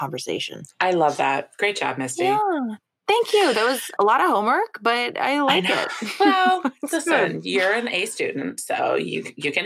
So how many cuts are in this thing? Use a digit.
1